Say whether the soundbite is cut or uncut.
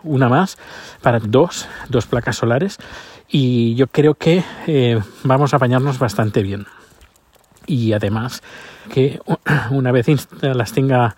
cut